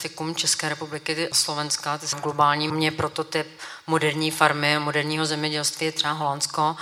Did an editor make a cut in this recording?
yes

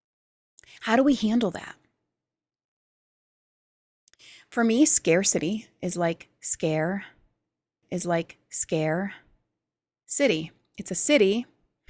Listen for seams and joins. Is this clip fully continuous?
no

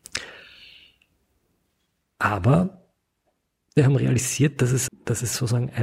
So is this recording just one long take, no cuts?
no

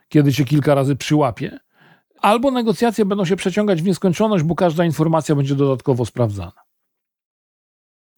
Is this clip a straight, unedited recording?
yes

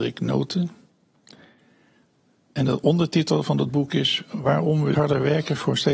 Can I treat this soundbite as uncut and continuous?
no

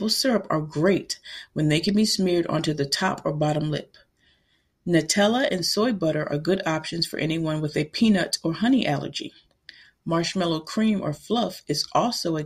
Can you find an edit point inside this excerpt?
no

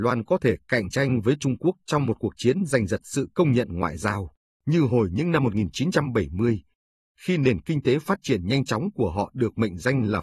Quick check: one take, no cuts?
yes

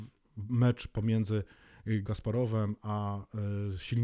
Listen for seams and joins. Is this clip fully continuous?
no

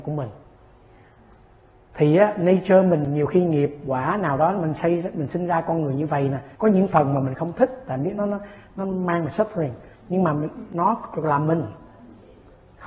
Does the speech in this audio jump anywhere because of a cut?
yes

